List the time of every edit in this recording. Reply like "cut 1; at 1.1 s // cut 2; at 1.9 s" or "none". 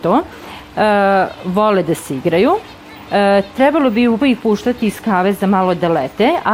cut 1; at 4.2 s